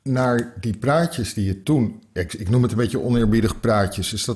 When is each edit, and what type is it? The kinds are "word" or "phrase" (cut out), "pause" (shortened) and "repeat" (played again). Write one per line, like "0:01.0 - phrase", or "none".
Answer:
none

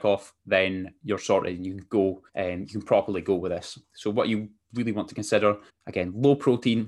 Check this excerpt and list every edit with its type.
0:02.3 - pause
0:03.8 - pause
0:05.7 - pause

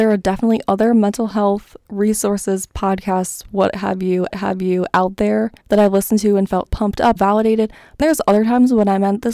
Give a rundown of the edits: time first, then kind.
0:04.3 - repeat
0:05.6 - pause
0:06.7 - word
0:07.2 - word
0:08.0 - word

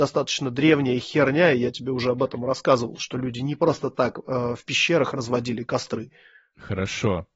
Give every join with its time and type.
none

